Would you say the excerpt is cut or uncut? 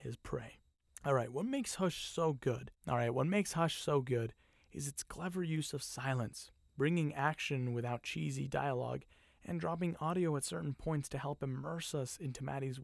uncut